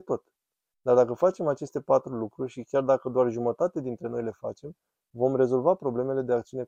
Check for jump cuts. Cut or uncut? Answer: uncut